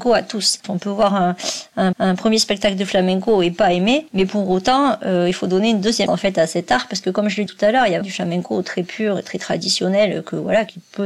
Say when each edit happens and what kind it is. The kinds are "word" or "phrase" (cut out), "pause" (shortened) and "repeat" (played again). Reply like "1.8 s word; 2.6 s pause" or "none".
1.9 s repeat; 6.1 s word; 7.5 s word; 8.0 s word